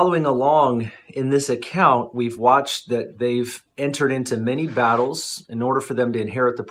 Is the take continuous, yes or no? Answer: yes